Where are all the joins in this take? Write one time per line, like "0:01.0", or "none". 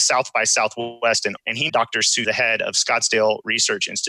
0:01.4
0:01.7
0:02.2